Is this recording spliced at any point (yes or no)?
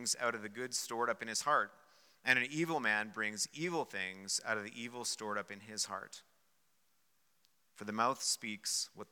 no